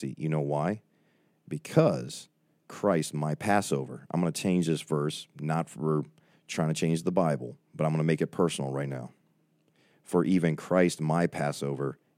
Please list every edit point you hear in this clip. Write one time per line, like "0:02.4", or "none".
0:06.3